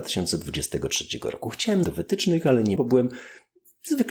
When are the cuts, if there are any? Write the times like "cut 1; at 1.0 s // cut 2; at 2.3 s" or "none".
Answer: cut 1; at 1.8 s // cut 2; at 2.8 s